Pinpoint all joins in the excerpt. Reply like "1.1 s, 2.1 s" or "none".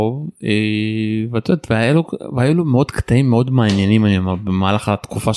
none